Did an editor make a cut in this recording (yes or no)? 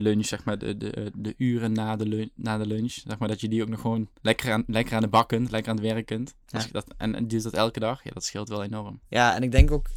yes